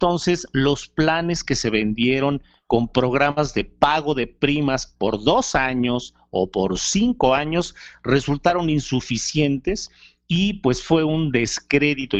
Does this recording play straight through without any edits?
yes; 0 cuts

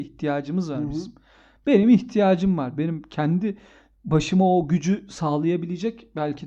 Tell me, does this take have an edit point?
no; 0 cuts

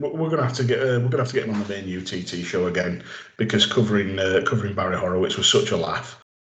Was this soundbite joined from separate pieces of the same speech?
no; 0 cuts

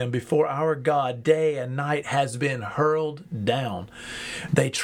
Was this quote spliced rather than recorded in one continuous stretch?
no; 0 cuts

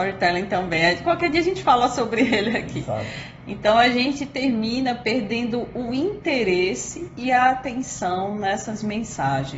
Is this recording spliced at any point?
no; 0 cuts

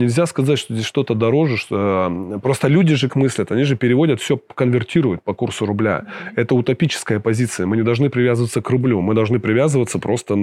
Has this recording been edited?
yes; 1 cut; at 3.1 s

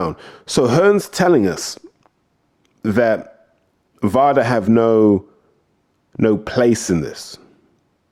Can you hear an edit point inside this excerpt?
no; 0 cuts

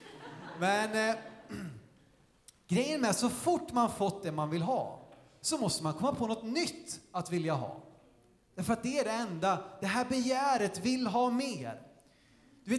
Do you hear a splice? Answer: no; 0 cuts

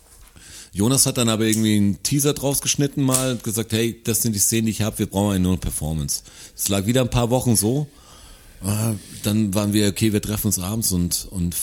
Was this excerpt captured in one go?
yes; 0 cuts

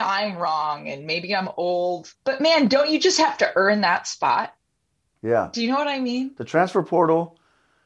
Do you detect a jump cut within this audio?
yes; 1 cut; at 2.2 s

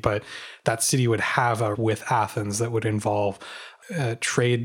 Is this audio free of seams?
no; 1 cut; at 1.7 s

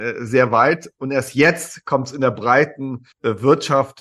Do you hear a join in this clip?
yes; 1 cut; at 3.1 s

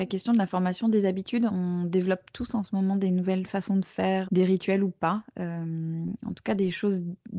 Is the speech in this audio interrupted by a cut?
yes; 2 cuts; at 1.5 s, 4.2 s

